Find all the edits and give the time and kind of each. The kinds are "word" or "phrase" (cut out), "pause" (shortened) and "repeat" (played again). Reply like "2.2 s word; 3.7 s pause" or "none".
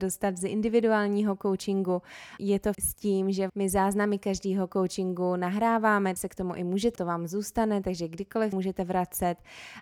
2.7 s word; 3.5 s word; 6.2 s word; 7.0 s word; 8.5 s phrase